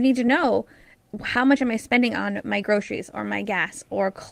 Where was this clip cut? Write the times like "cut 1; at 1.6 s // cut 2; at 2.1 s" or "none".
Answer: none